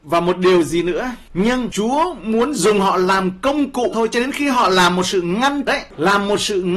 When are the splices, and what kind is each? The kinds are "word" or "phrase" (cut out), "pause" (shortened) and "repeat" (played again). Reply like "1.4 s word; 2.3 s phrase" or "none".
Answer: 3.9 s word; 5.7 s word